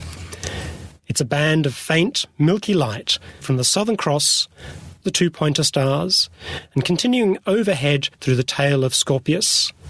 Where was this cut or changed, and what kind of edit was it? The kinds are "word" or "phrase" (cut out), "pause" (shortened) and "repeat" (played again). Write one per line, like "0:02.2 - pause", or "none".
0:03.4 - word
0:05.0 - word
0:08.1 - pause

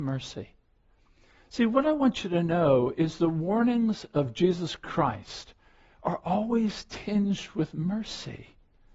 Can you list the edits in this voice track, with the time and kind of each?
none

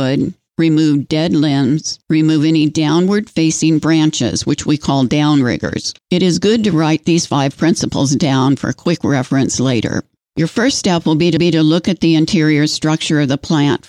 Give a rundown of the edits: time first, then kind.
0:06.0 - pause
0:11.4 - repeat

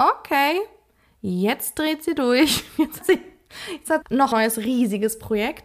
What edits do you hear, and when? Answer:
0:03.0 - word
0:04.0 - word
0:04.3 - word

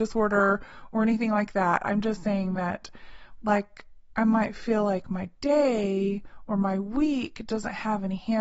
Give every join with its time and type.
none

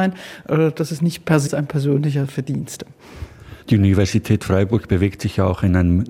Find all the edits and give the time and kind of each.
0:01.5 - word
0:03.6 - pause

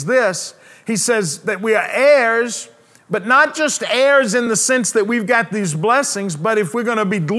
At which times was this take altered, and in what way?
none

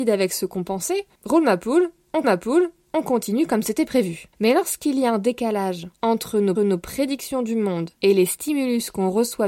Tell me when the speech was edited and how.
0:01.1 - pause
0:02.2 - repeat
0:04.3 - pause
0:05.9 - pause
0:06.6 - repeat
0:08.0 - pause

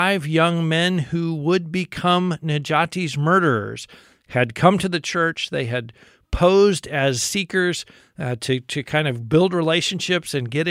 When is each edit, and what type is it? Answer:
none

